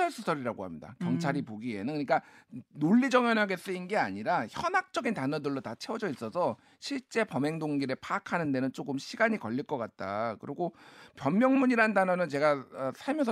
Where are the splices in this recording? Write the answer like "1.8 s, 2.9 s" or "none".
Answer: none

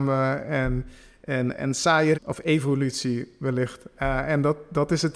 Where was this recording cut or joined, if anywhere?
2.1 s

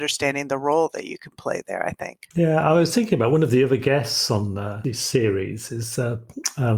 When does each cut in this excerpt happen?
2.3 s

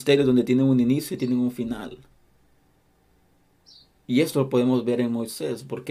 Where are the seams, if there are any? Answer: none

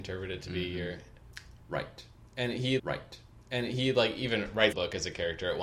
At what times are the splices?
2.8 s, 4.7 s

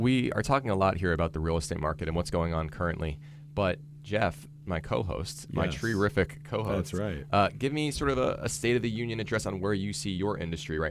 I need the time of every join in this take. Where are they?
none

